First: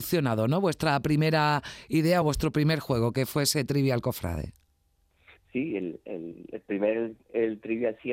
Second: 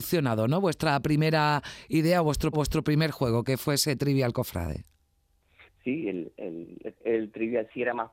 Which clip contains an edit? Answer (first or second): second